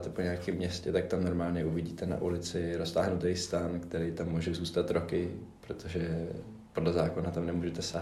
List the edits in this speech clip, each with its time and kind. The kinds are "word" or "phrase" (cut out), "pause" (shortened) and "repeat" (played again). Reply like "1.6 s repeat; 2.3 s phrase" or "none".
none